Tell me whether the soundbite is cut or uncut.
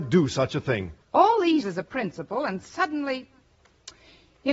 cut